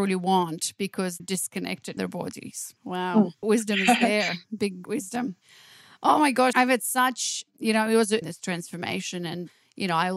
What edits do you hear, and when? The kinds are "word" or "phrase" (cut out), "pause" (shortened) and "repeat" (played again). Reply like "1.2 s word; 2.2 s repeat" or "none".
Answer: 1.2 s word; 2.0 s word; 2.8 s pause; 3.4 s word; 4.8 s word; 6.5 s word; 8.2 s phrase